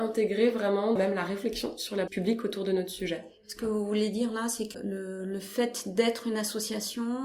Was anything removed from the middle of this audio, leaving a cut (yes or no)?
yes